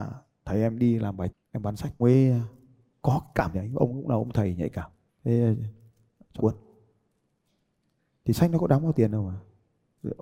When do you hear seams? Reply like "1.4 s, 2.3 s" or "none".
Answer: 1.3 s, 2.0 s, 3.5 s, 6.4 s